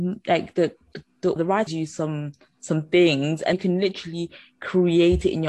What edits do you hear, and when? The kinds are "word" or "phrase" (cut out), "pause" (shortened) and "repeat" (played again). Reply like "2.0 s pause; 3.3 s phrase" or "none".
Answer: 1.4 s word; 1.7 s word; 3.5 s word